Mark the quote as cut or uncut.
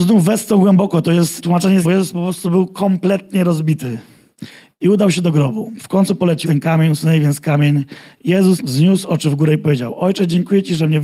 cut